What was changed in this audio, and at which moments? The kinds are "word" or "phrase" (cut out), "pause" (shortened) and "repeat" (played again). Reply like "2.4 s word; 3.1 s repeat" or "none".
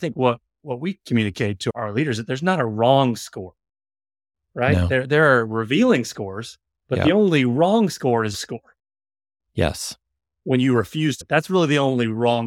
8.3 s word; 11.2 s word